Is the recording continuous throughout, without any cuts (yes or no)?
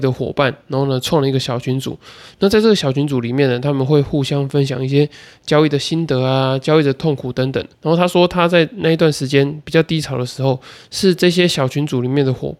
no